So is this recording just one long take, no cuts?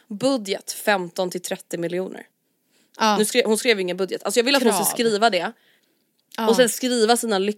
yes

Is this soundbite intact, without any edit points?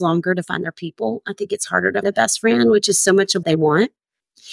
no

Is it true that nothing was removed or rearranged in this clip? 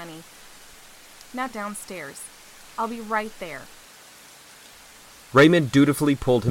no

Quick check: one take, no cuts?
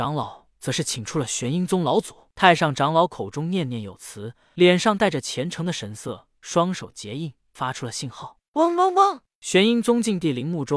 yes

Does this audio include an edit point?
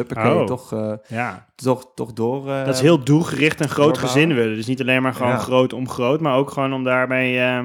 no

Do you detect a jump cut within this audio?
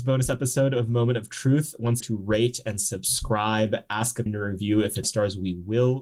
yes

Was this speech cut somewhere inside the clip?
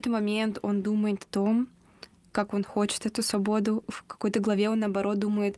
no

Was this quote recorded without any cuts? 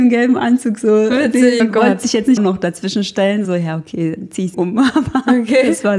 no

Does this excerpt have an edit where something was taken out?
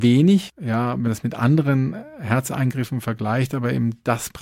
yes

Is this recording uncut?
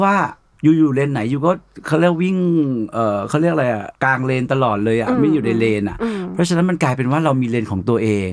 no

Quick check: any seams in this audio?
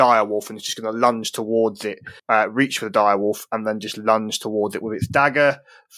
yes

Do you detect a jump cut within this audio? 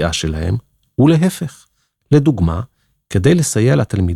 no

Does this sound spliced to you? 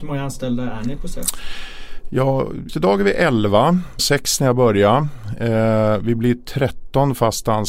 yes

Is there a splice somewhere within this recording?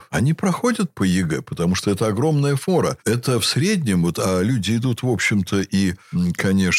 no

